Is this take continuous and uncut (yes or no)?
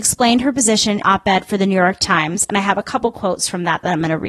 no